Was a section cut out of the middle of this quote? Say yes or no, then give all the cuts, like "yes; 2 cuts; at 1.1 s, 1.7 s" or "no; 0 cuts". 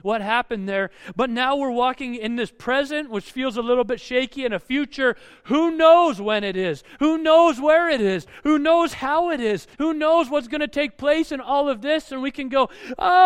yes; 1 cut; at 9.7 s